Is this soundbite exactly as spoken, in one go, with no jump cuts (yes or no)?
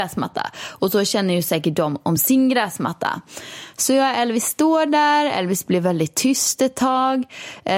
yes